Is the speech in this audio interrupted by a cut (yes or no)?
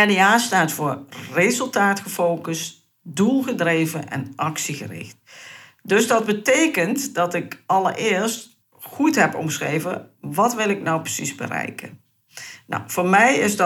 yes